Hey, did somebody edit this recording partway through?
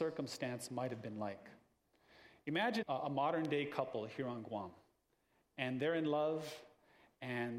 yes; 1 cut; at 2.8 s

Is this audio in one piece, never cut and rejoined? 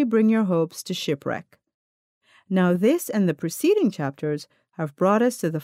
yes; 0 cuts

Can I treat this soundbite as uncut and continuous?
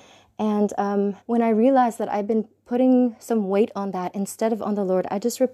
no; 1 cut; at 1.2 s

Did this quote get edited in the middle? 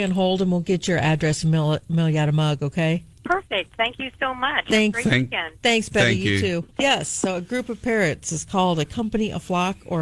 yes; 2 cuts; at 3.1 s, 6.7 s

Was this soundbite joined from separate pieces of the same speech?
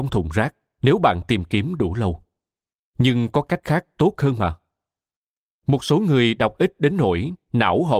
no; 0 cuts

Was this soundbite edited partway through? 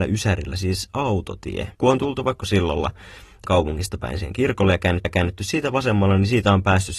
yes; 4 cuts; at 1.7 s, 2.4 s, 3.4 s, 5.0 s

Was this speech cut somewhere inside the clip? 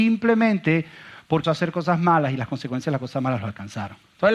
yes; 1 cut; at 1.4 s

